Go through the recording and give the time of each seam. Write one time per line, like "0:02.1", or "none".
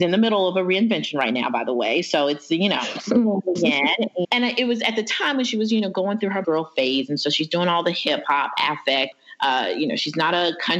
0:04.2
0:06.4